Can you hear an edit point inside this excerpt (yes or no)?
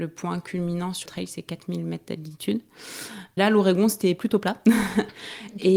yes